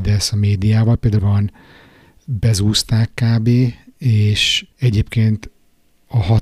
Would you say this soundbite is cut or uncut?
cut